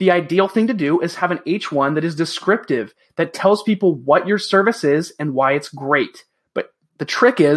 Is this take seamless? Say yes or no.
yes